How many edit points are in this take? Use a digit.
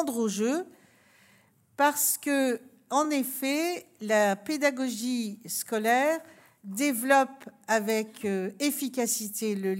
0